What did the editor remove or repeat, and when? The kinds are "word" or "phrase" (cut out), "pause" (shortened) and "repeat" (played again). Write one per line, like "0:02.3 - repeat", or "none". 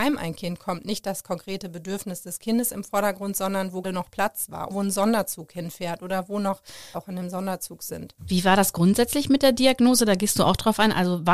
0:03.8 - word
0:04.7 - word
0:06.9 - word
0:08.2 - pause